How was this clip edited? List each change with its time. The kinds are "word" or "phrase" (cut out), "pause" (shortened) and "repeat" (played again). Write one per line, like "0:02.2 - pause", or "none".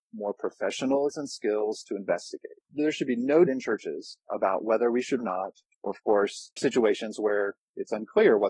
0:01.1 - word
0:02.6 - pause
0:03.5 - word
0:04.2 - pause
0:05.2 - phrase
0:05.7 - pause
0:06.6 - phrase